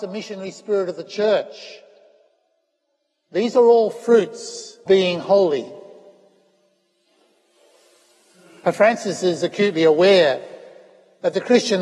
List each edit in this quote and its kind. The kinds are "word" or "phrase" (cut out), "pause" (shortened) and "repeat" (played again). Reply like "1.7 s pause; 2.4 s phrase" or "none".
4.9 s phrase